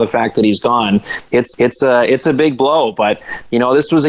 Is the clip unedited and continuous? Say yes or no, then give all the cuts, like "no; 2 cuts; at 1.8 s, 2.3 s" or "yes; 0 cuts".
no; 1 cut; at 1.5 s